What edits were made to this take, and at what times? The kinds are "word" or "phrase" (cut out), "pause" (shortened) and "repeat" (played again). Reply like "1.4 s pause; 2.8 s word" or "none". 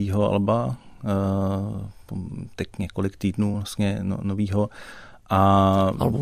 none